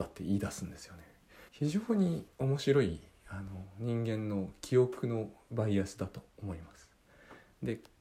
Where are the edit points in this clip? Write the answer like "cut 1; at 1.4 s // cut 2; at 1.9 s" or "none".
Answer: cut 1; at 1.5 s // cut 2; at 2.3 s